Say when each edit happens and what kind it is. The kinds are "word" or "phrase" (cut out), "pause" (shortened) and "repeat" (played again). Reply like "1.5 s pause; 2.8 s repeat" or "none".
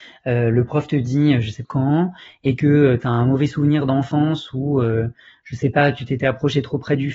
1.6 s phrase